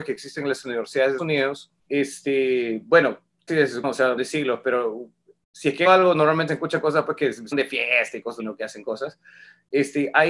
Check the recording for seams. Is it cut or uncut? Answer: cut